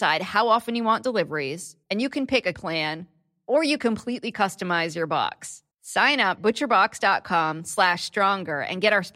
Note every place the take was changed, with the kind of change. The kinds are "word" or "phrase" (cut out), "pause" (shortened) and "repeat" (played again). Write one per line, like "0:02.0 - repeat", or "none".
0:01.8 - pause
0:02.5 - word
0:03.8 - word
0:05.7 - pause
0:06.4 - word

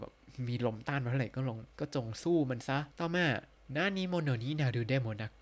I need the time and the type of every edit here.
0:01.7 - pause
0:02.9 - pause
0:03.5 - pause

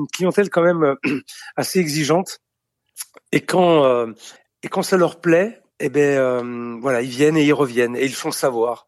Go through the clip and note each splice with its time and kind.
0:04.4 - pause
0:05.7 - pause

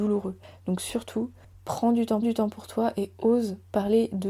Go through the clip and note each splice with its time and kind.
0:02.2 - repeat

